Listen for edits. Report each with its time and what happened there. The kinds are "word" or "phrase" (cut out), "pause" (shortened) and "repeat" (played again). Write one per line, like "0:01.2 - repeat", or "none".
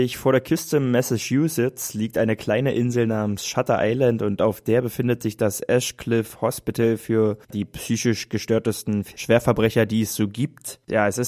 0:07.4 - pause